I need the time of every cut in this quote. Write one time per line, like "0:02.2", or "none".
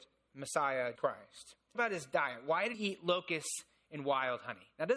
0:01.0
0:01.7
0:02.7